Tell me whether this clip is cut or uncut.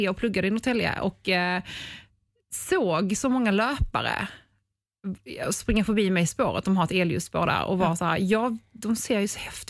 uncut